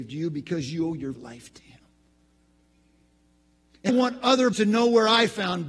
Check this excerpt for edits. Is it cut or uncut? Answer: cut